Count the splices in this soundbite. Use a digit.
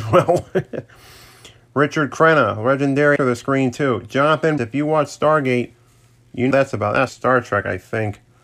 4